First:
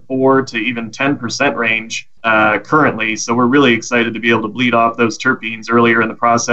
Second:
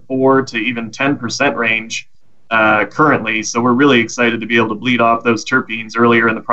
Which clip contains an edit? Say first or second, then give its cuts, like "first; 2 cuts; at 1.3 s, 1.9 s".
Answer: first; 1 cut; at 2.2 s